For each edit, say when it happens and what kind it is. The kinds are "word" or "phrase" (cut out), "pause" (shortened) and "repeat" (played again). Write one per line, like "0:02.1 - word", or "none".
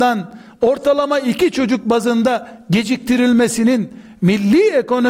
none